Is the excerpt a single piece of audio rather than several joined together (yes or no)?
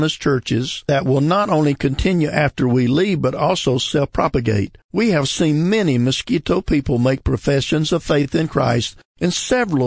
no